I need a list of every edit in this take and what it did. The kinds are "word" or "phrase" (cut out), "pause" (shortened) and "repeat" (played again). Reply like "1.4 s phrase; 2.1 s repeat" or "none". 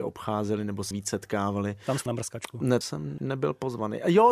0.9 s word; 2.1 s word; 2.8 s word; 3.2 s word